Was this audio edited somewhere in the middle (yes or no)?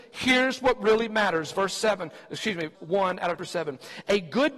yes